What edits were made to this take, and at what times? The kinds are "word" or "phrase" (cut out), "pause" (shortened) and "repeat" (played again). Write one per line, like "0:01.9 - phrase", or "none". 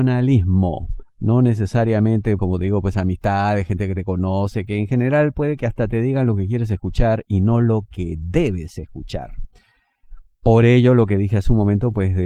0:01.1 - pause
0:02.4 - word